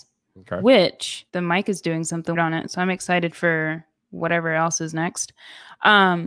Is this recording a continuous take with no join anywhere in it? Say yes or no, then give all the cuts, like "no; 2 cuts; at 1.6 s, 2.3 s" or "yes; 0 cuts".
no; 3 cuts; at 1.3 s, 2.4 s, 4.0 s